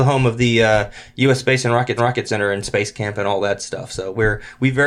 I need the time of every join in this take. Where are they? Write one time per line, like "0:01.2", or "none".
0:02.0